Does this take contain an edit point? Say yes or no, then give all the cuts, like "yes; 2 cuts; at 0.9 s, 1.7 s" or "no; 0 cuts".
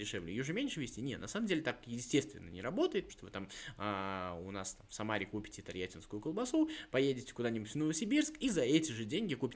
yes; 1 cut; at 3.1 s